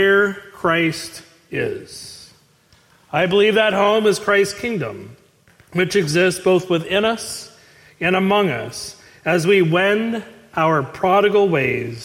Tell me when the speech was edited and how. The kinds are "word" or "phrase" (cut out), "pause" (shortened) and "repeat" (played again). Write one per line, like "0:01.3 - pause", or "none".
none